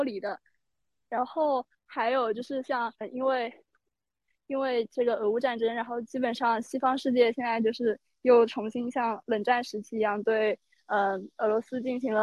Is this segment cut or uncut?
cut